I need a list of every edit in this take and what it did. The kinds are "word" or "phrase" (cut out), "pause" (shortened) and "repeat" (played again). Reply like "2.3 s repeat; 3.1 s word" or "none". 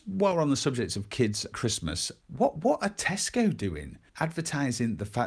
1.5 s word; 2.2 s word; 4.1 s pause